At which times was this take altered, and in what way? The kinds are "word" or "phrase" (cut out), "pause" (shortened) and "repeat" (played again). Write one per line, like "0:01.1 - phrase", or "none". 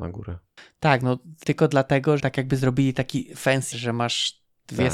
0:01.4 - word
0:02.2 - word
0:03.7 - word